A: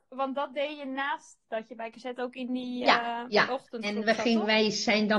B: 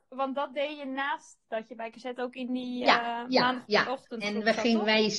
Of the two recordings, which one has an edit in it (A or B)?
A